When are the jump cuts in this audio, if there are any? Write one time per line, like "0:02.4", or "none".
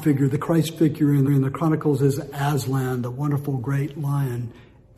0:01.3